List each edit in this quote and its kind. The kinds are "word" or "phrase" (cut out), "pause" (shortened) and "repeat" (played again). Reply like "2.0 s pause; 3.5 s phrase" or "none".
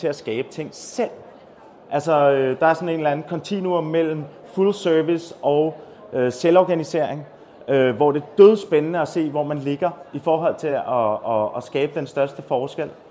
none